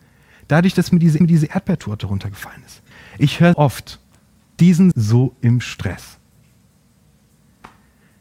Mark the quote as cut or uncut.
cut